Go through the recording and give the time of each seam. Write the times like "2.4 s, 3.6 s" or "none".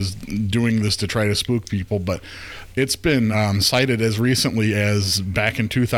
none